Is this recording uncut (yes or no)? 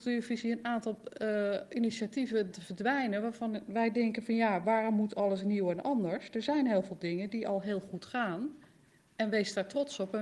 no